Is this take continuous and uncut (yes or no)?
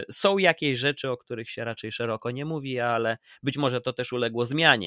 yes